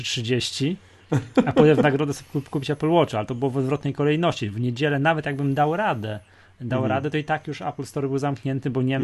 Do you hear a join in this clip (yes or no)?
no